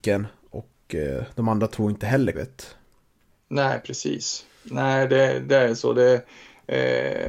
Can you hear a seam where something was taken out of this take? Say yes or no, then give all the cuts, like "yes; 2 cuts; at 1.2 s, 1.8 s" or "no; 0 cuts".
yes; 1 cut; at 2.3 s